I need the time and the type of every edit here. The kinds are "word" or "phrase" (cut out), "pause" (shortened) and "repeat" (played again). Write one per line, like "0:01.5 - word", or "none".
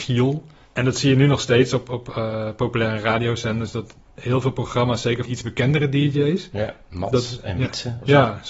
0:05.3 - word